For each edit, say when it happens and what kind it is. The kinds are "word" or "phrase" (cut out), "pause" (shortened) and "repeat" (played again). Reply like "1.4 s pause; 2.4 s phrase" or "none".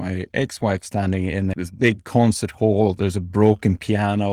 none